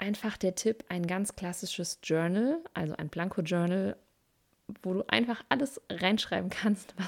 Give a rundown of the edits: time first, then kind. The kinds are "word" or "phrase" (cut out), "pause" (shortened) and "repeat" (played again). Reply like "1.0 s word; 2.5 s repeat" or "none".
none